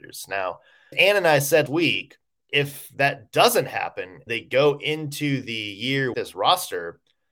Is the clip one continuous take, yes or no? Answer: no